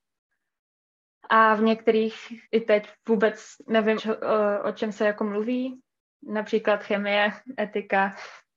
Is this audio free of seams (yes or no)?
no